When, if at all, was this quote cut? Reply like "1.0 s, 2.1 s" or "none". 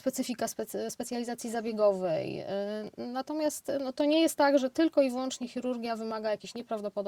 none